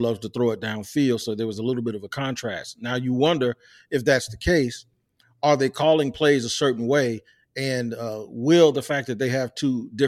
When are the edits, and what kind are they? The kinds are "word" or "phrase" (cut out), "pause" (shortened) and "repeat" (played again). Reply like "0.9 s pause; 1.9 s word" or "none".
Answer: none